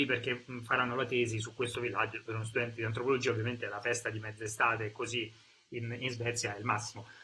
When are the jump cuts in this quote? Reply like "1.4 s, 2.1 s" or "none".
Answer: 1.7 s